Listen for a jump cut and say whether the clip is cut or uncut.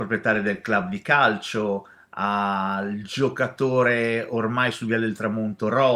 uncut